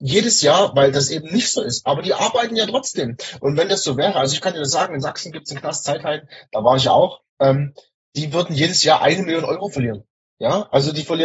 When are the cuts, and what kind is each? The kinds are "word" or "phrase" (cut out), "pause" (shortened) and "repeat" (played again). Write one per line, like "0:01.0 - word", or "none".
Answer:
0:07.3 - pause
0:10.2 - pause